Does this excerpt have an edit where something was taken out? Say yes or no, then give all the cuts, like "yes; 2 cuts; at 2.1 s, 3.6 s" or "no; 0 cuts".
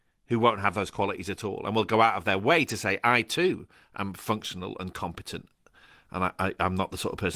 no; 0 cuts